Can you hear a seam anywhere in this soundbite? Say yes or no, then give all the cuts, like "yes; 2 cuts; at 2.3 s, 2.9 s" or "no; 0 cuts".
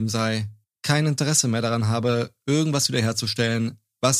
no; 0 cuts